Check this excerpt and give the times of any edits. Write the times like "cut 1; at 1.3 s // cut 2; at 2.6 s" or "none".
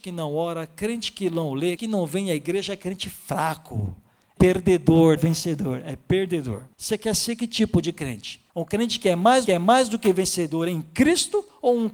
cut 1; at 1.8 s // cut 2; at 4.4 s // cut 3; at 5.2 s // cut 4; at 6.7 s // cut 5; at 8.5 s // cut 6; at 9.5 s